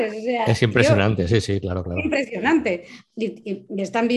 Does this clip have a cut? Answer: no; 0 cuts

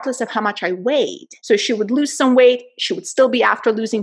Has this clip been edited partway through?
yes; 1 cut; at 1.4 s

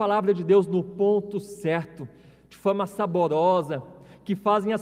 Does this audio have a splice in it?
no; 0 cuts

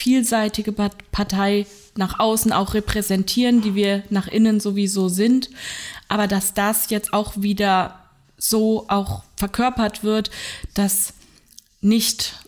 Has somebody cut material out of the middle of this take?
no; 0 cuts

